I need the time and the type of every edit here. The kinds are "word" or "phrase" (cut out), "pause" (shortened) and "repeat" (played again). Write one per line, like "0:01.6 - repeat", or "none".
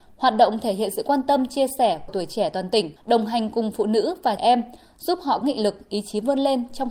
0:02.1 - word
0:03.0 - pause
0:04.4 - word
0:05.4 - word